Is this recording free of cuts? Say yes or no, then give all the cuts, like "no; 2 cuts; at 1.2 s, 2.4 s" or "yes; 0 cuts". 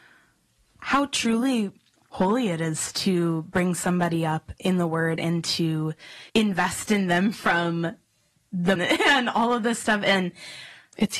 no; 2 cuts; at 6.3 s, 8.8 s